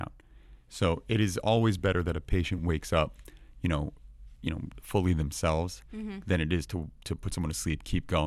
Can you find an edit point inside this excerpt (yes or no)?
no